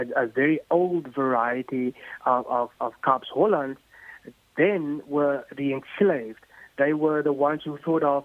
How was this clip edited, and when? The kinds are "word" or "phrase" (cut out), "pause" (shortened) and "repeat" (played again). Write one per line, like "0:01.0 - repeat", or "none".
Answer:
none